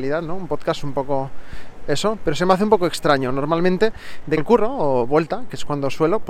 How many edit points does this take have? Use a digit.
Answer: 2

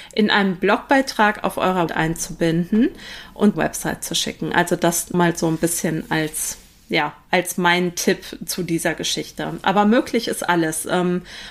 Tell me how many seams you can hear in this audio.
3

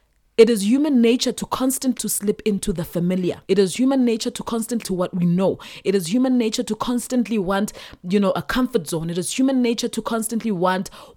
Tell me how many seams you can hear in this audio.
3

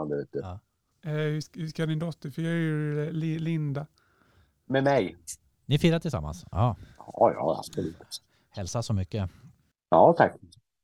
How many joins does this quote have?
0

